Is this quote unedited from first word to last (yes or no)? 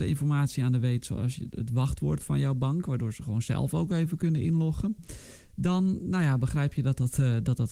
yes